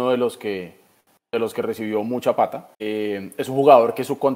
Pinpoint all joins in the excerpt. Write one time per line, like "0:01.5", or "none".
0:02.7